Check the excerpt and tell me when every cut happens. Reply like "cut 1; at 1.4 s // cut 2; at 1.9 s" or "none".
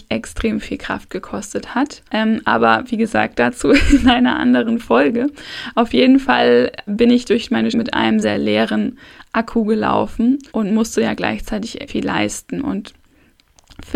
cut 1; at 2.1 s // cut 2; at 6.9 s // cut 3; at 7.7 s // cut 4; at 8.2 s // cut 5; at 10.5 s // cut 6; at 11.9 s